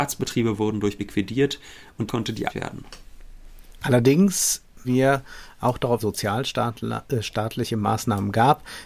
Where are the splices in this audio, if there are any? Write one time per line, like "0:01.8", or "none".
0:01.0
0:02.1
0:02.5
0:04.8
0:06.0